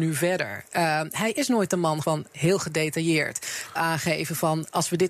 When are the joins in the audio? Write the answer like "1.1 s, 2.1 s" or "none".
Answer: 2.0 s, 3.8 s